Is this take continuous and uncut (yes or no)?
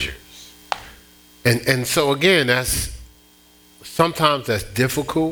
yes